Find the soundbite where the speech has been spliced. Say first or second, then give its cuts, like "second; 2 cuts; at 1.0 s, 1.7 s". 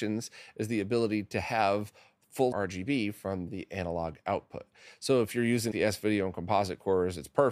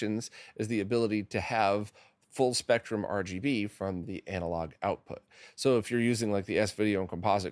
first; 2 cuts; at 2.5 s, 5.7 s